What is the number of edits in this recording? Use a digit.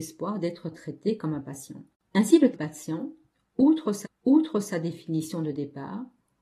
3